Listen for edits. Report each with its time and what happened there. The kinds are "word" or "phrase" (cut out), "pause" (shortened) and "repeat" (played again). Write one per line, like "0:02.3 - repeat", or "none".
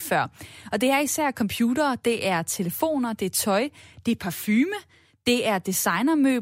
none